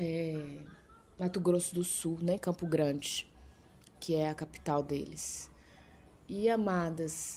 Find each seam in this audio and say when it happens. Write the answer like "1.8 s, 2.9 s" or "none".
none

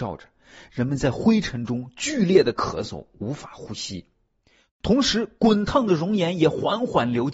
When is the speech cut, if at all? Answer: none

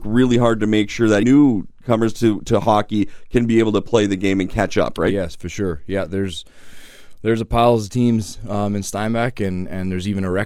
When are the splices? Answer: 1.2 s

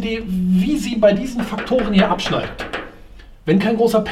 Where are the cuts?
none

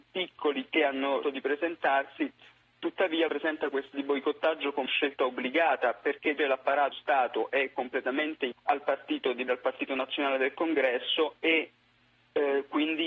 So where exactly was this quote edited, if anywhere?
1.2 s, 3.3 s, 3.9 s, 4.9 s, 6.4 s, 6.9 s, 8.5 s, 9.5 s

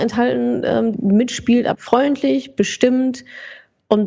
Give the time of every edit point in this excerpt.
0.9 s, 1.7 s

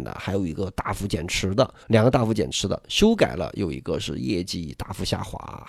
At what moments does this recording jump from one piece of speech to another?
1.8 s

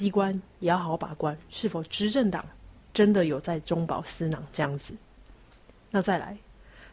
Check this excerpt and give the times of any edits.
2.8 s

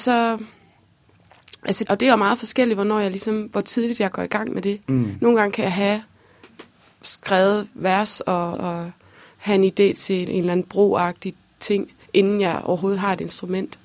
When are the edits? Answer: 1.9 s, 8.5 s, 10.3 s, 12.0 s

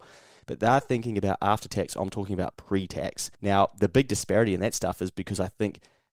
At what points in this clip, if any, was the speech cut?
3.3 s

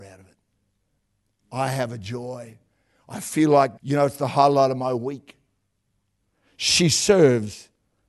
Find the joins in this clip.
3.8 s

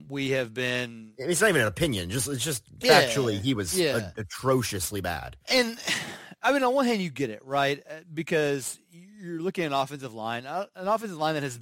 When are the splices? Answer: 5.4 s

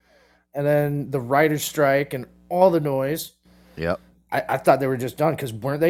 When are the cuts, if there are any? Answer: none

